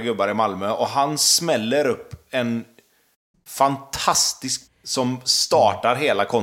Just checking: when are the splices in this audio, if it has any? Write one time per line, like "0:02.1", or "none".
0:04.7